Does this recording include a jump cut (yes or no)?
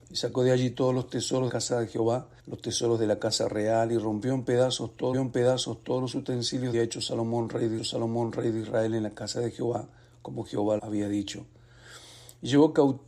yes